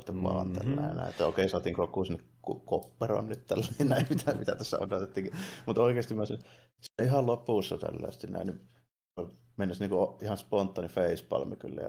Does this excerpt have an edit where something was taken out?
yes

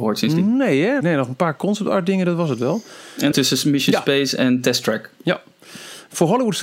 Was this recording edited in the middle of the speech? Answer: yes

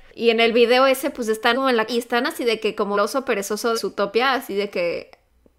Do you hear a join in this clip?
yes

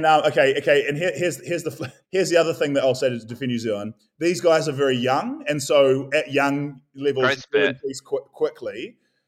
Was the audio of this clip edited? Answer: yes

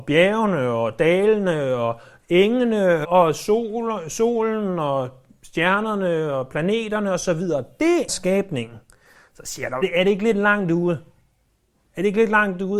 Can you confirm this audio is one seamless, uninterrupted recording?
no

